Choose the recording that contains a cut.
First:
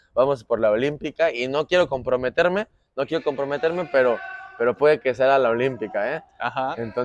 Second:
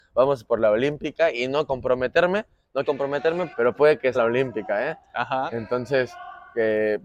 second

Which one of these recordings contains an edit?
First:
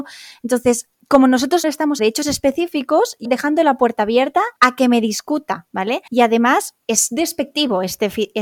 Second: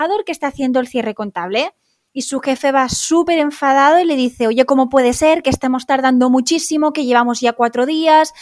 first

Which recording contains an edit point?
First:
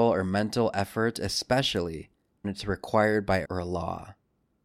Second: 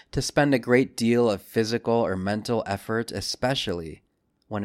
first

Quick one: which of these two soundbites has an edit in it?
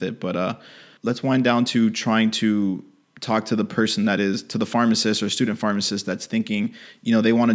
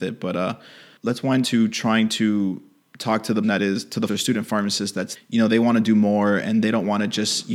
second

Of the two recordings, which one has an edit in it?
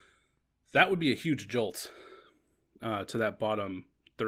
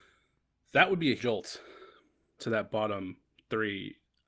second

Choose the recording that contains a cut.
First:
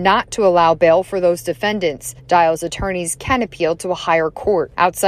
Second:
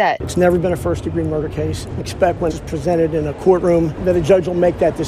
second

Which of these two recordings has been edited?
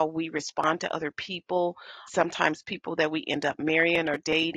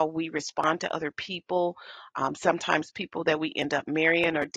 first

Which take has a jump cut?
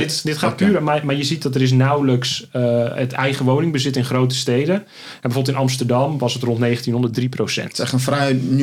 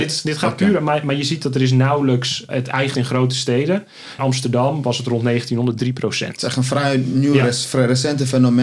second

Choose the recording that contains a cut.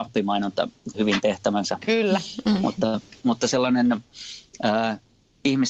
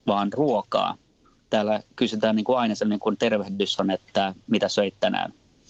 first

